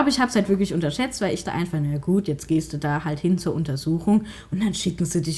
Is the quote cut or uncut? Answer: cut